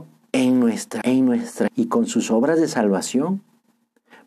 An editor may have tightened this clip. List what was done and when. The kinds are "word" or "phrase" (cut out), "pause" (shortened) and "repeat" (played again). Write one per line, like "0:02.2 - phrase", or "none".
0:01.0 - word
0:01.7 - phrase